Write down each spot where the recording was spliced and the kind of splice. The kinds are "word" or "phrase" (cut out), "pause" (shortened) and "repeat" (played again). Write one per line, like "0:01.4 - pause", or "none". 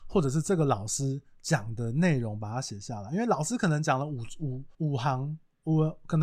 0:04.7 - pause